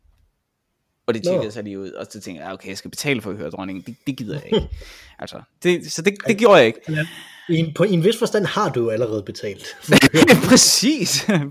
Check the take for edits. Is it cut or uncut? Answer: uncut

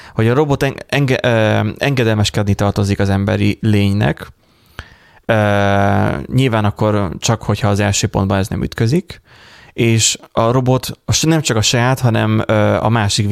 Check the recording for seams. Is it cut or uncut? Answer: uncut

